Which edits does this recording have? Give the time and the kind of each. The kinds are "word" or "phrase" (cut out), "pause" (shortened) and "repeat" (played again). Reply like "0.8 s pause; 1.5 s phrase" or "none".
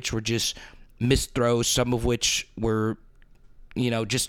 none